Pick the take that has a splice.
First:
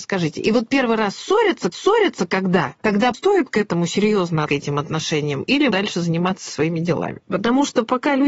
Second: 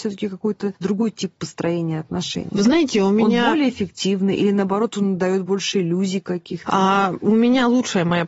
first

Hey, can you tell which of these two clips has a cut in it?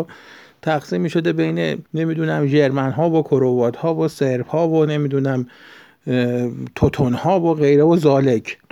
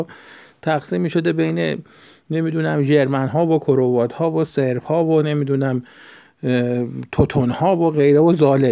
first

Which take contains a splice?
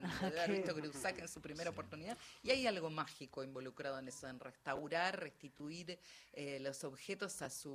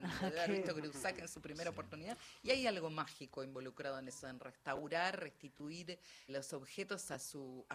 second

